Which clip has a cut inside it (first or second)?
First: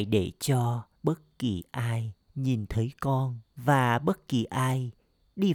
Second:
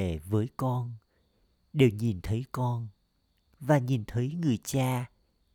first